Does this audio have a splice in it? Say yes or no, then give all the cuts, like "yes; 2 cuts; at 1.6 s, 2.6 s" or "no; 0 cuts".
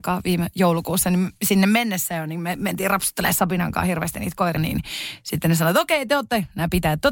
yes; 1 cut; at 4.6 s